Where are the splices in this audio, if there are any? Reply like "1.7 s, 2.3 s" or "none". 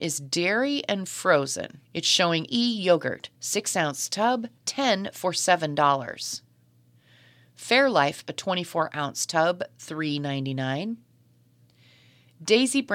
1.8 s, 2.5 s, 3.3 s, 4.6 s, 8.3 s